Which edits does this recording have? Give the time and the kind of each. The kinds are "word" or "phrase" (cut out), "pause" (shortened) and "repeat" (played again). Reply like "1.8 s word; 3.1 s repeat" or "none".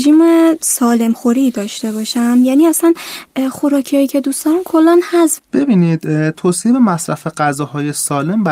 5.4 s word